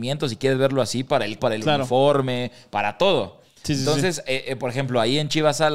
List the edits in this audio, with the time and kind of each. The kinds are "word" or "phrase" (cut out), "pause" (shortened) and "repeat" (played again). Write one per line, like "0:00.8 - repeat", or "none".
0:01.4 - word